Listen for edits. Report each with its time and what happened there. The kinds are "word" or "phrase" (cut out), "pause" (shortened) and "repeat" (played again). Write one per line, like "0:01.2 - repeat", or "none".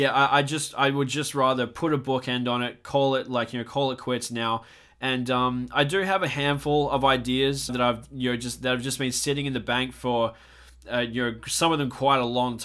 0:07.7 - word